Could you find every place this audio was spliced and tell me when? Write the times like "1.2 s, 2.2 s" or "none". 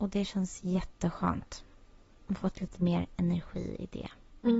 none